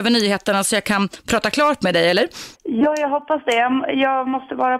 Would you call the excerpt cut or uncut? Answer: cut